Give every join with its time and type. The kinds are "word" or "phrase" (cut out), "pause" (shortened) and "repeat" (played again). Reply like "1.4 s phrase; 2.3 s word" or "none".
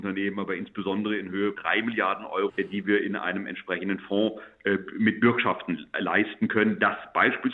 1.5 s word; 2.5 s word